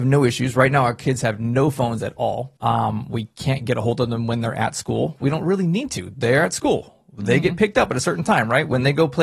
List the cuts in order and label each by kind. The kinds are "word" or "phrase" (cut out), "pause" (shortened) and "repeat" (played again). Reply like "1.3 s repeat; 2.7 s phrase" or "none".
2.6 s pause